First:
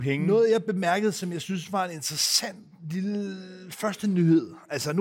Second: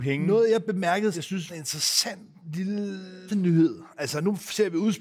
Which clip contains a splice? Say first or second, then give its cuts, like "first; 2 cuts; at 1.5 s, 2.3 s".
second; 3 cuts; at 1.1 s, 1.5 s, 3.3 s